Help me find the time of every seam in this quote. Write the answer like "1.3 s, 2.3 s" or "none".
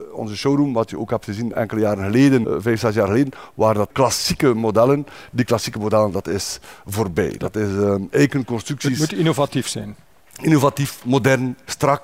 2.4 s, 3.9 s